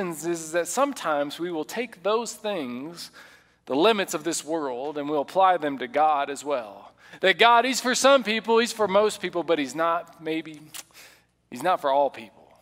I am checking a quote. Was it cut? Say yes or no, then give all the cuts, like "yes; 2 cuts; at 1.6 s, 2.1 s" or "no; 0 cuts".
no; 0 cuts